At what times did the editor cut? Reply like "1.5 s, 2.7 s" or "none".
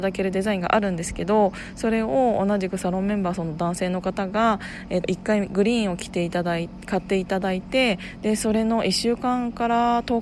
5.0 s

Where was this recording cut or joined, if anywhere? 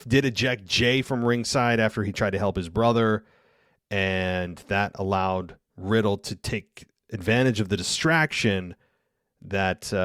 none

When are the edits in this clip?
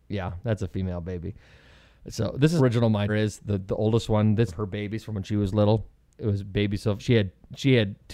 2.6 s, 3.1 s, 4.5 s, 6.2 s, 7.0 s

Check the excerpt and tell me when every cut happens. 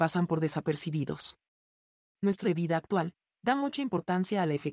2.4 s

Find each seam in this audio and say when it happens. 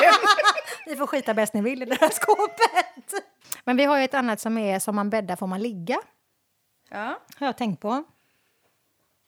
none

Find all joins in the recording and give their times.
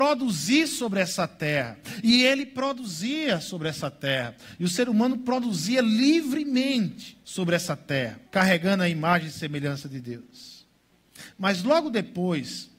7.2 s, 8.2 s

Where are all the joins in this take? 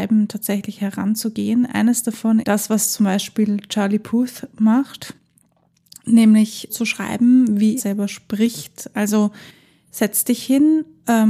2.4 s, 6.7 s, 7.8 s

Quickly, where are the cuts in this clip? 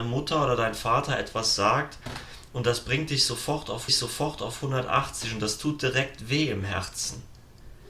3.9 s

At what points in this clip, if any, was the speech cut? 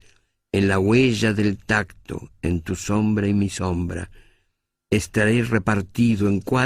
none

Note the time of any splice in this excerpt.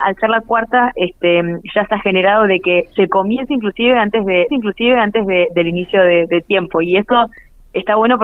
4.5 s

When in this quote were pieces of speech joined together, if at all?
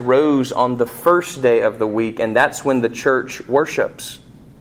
none

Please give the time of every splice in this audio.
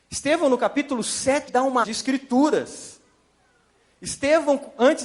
1.5 s, 1.8 s

